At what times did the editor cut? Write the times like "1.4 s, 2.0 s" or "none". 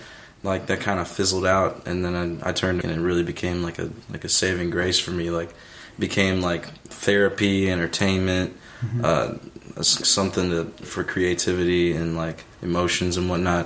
2.8 s, 10.0 s, 10.8 s